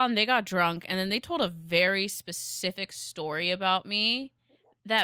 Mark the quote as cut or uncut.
uncut